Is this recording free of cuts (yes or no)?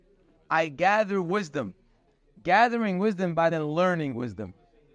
no